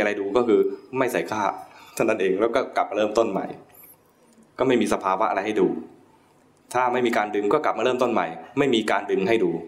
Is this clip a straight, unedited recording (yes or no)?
yes